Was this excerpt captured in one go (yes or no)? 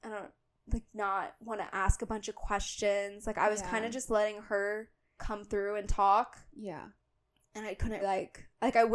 no